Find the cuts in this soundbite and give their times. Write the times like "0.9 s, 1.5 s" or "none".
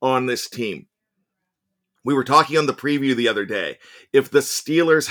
none

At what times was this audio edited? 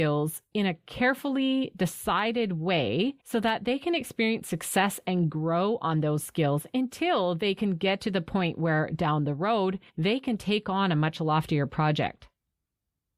3.2 s, 9.9 s

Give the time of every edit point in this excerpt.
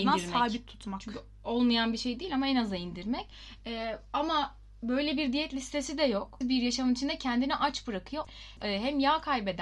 6.4 s

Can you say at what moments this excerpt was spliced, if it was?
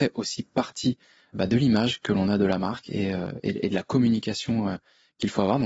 none

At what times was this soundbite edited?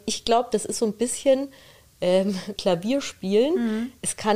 2.6 s

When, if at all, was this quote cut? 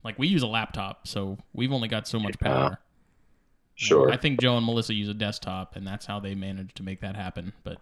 none

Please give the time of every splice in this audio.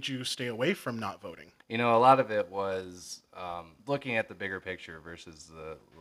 1.6 s, 3.8 s

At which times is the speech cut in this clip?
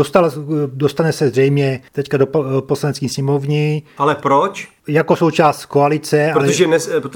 1.9 s, 4.8 s

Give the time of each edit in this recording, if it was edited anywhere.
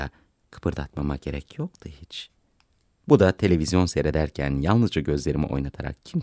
none

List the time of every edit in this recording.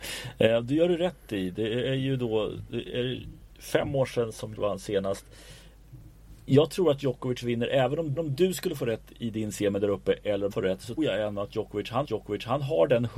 4.6 s, 8.2 s, 10.5 s, 11.0 s, 12.0 s

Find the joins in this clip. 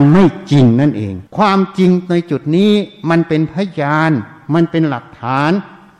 1.3 s

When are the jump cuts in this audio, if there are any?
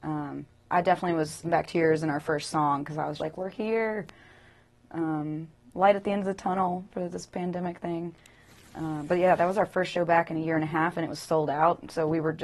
1.4 s, 3.2 s

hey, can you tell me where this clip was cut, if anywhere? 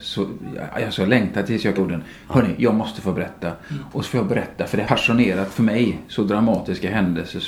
1.8 s, 4.8 s

